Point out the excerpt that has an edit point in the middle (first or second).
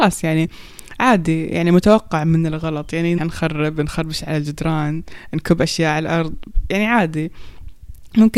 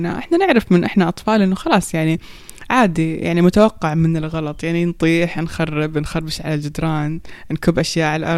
first